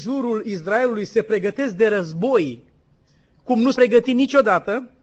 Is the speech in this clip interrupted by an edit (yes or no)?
yes